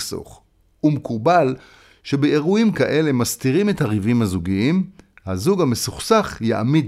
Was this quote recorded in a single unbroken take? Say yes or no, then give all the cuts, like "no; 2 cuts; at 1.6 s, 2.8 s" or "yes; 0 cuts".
yes; 0 cuts